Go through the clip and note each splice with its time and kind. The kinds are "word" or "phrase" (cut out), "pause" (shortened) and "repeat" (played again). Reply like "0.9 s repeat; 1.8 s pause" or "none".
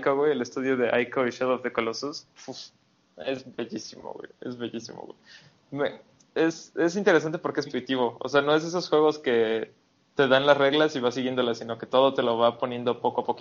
7.7 s word